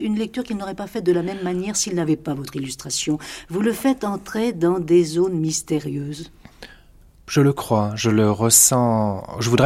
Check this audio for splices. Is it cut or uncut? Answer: uncut